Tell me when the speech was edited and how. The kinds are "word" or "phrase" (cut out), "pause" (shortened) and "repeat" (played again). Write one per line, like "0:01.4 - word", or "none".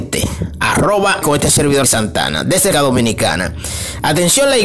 0:01.2 - word
0:01.8 - word
0:02.7 - word